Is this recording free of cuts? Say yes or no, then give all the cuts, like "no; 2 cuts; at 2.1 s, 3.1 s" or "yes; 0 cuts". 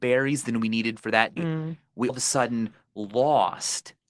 no; 2 cuts; at 1.4 s, 2.1 s